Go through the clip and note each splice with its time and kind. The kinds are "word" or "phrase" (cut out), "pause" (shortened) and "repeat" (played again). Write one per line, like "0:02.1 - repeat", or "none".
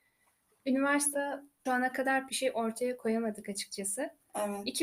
0:01.1 - word
0:01.7 - word
0:02.3 - word